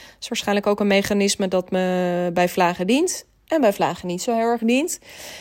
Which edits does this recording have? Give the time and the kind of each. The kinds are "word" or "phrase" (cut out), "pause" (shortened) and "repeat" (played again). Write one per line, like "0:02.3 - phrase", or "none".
none